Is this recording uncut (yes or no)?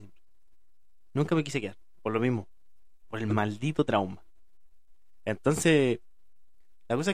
yes